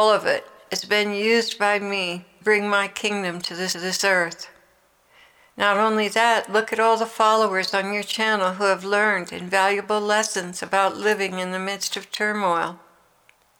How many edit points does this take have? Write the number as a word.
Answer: two